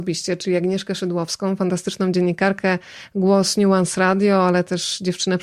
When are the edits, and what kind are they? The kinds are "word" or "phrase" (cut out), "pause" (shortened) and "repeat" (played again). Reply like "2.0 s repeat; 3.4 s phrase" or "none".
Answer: none